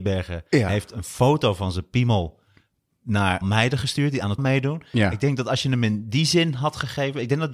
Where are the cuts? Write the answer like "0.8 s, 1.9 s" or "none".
3.4 s, 4.4 s

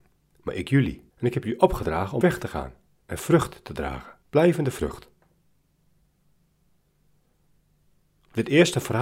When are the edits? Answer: 1.1 s, 2.2 s, 2.9 s, 4.2 s

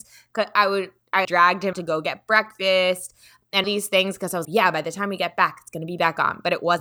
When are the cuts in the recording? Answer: 1.2 s, 1.7 s, 3.6 s, 4.4 s

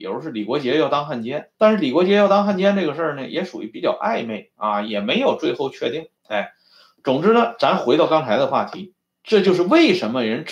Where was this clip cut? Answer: 1.5 s, 6.2 s, 9.0 s

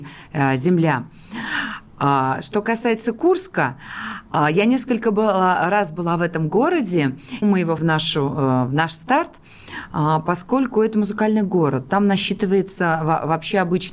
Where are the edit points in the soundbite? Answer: 7.4 s, 7.8 s

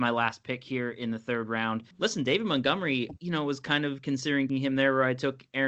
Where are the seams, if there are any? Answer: 3.2 s, 4.5 s

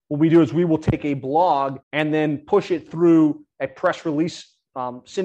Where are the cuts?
1.8 s

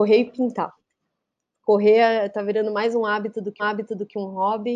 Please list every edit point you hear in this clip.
3.6 s

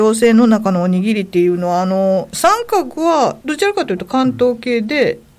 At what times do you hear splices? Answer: 3.4 s

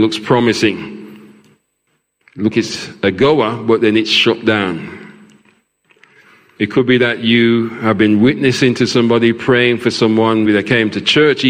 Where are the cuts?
2.5 s, 10.4 s

